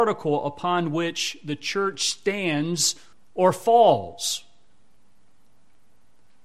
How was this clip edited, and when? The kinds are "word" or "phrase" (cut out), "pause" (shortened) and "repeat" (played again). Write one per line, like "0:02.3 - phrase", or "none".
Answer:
0:03.1 - pause